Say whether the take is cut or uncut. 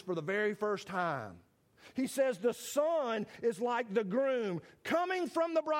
uncut